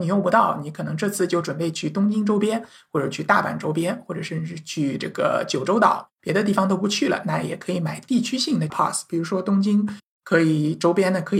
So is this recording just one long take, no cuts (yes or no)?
no